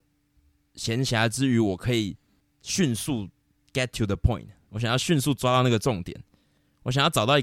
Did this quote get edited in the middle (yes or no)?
no